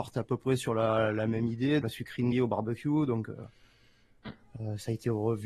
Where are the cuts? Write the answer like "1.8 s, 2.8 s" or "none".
1.8 s, 2.3 s